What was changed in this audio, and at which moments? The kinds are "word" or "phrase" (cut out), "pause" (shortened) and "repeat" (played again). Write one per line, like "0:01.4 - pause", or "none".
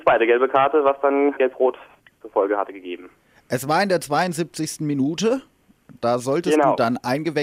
0:01.4 - word